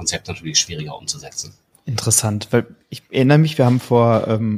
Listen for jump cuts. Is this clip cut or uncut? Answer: uncut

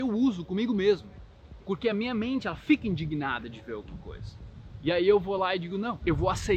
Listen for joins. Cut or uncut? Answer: uncut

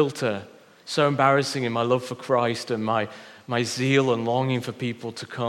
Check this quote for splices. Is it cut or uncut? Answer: uncut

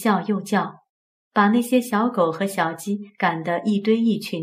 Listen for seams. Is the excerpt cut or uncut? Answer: uncut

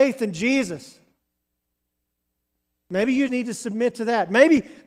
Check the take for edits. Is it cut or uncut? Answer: cut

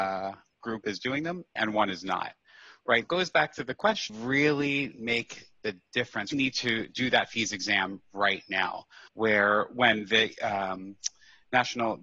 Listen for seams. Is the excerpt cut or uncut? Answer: cut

